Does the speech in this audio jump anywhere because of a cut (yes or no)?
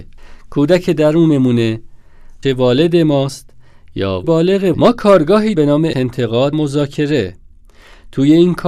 yes